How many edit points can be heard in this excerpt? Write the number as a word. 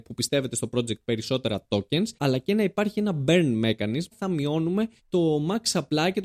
three